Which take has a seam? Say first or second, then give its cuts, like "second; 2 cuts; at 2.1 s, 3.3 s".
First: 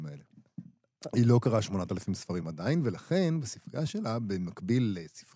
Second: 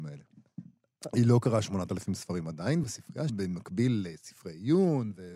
second; 2 cuts; at 2.8 s, 3.3 s